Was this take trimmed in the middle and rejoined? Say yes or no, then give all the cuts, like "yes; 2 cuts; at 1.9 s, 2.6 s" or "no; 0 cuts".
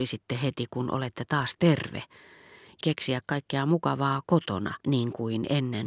yes; 2 cuts; at 2.8 s, 4.8 s